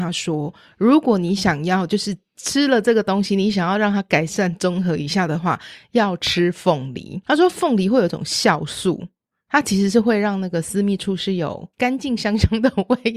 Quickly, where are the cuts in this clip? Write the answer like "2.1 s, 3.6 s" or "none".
11.7 s